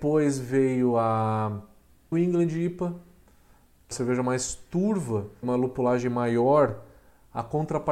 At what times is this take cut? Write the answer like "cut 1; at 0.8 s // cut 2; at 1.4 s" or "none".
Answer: cut 1; at 2.1 s // cut 2; at 3.9 s // cut 3; at 5.4 s